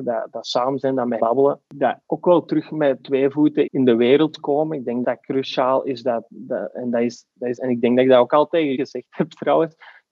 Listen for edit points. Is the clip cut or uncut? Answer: cut